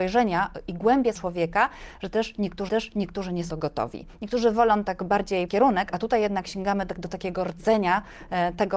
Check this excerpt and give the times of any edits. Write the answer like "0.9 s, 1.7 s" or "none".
1.2 s, 2.7 s, 3.5 s, 5.5 s